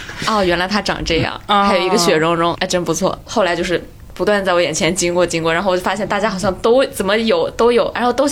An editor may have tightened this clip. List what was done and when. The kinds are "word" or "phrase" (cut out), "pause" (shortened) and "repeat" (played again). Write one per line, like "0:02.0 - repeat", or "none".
0:02.6 - word